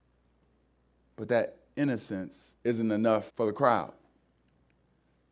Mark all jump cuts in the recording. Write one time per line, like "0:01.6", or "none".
0:02.6
0:03.3